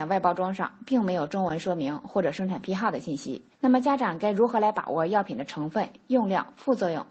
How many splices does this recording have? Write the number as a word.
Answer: one